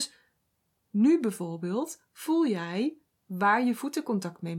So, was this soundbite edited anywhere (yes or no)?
no